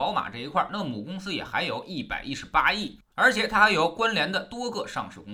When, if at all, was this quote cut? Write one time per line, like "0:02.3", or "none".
0:03.1